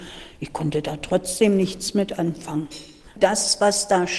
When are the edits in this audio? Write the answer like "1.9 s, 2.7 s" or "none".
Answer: none